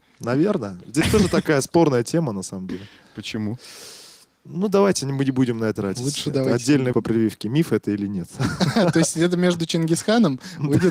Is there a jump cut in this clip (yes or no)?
yes